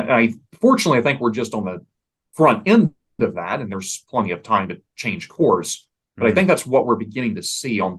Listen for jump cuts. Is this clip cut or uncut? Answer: uncut